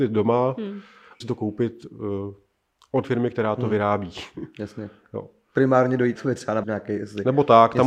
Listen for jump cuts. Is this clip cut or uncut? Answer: cut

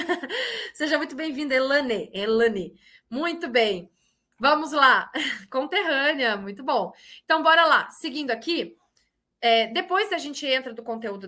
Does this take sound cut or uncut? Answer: uncut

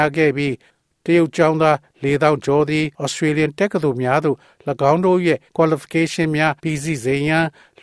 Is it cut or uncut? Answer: cut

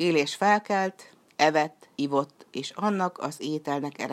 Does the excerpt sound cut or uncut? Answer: cut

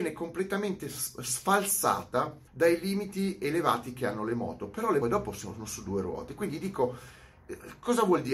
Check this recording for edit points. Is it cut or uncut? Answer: cut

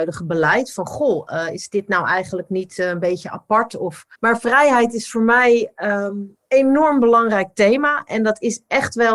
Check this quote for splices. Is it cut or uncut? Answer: cut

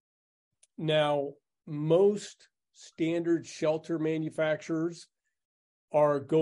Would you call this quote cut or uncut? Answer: uncut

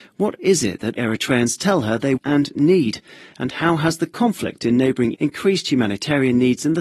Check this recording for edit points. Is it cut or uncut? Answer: cut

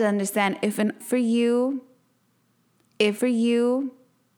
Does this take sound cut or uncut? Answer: cut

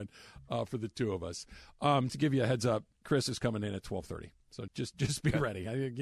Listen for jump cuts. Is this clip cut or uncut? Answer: cut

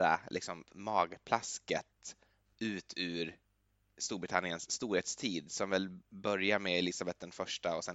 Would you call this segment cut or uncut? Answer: uncut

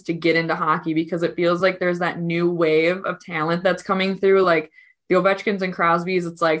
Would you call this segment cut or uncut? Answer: uncut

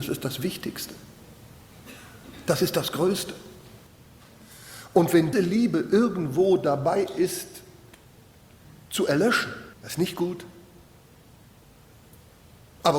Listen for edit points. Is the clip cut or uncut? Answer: cut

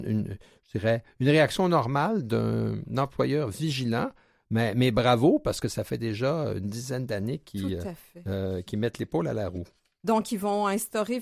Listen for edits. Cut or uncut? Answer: uncut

